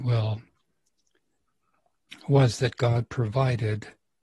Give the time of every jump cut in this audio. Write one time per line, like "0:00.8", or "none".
none